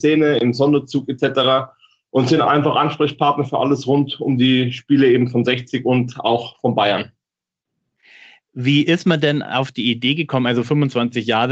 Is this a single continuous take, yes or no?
yes